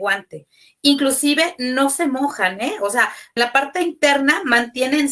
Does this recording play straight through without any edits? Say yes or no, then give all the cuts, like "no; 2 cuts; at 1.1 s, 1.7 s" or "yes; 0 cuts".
no; 1 cut; at 3.4 s